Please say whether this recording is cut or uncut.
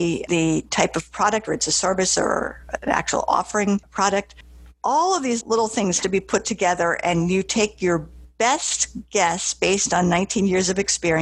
cut